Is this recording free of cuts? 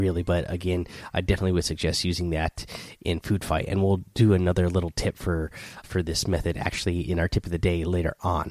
no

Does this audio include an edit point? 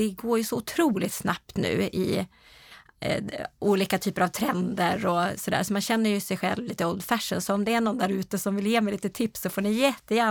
no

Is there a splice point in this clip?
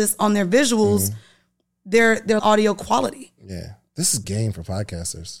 yes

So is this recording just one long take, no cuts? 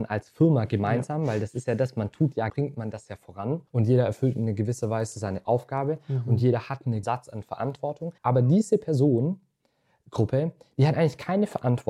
no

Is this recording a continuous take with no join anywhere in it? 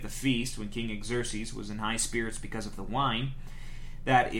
yes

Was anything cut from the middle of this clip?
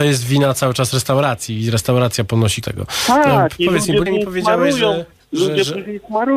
yes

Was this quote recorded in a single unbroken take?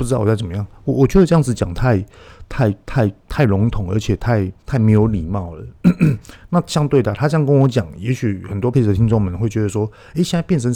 no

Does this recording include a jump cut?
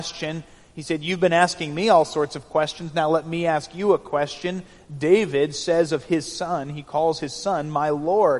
no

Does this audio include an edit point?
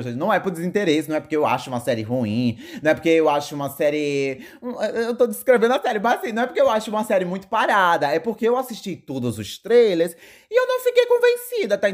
no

